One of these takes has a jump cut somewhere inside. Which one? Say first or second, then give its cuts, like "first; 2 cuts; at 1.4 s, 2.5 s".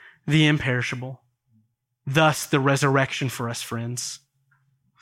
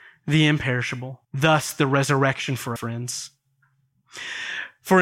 second; 2 cuts; at 1.2 s, 2.8 s